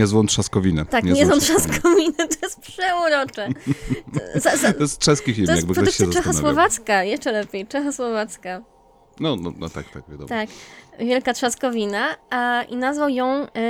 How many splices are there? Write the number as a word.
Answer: zero